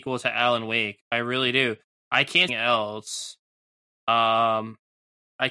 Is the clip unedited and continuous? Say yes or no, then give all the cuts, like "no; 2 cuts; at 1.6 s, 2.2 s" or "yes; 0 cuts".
no; 1 cut; at 2.5 s